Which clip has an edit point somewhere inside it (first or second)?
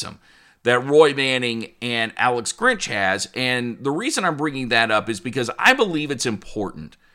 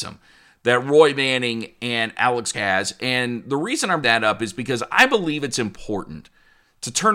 second